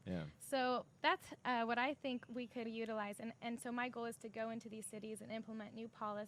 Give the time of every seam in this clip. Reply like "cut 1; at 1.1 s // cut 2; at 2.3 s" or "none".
cut 1; at 2.7 s